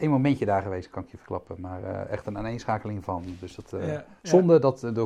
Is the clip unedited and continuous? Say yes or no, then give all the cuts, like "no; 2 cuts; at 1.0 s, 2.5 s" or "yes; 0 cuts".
yes; 0 cuts